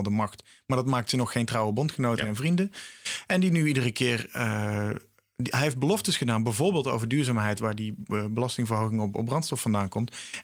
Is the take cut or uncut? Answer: uncut